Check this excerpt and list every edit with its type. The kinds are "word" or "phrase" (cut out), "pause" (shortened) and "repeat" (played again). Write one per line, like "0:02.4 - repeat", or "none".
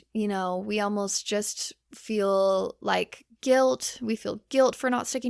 none